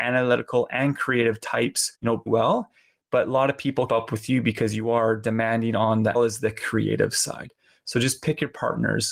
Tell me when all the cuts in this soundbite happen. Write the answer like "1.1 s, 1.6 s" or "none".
1.9 s, 2.3 s, 3.9 s, 6.1 s